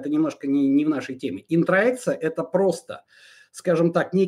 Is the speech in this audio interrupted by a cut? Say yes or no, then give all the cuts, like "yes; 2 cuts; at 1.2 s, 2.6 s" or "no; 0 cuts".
no; 0 cuts